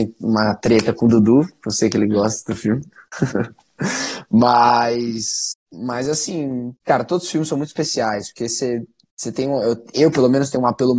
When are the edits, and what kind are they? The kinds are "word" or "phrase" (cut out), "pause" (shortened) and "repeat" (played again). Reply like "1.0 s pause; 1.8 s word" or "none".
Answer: 5.6 s pause; 6.8 s pause

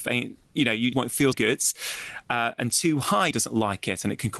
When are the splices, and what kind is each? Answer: 0.9 s word; 1.3 s word; 3.3 s phrase

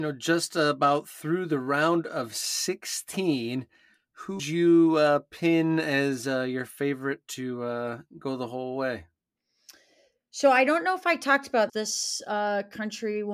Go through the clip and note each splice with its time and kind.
4.4 s word; 11.7 s word

